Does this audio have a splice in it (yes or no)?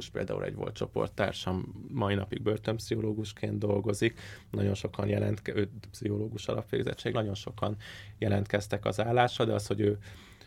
yes